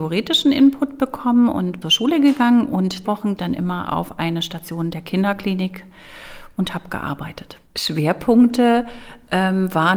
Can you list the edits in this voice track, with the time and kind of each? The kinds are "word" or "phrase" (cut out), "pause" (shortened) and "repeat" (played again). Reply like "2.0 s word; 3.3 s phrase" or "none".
1.8 s phrase; 3.0 s word; 3.4 s phrase; 7.7 s pause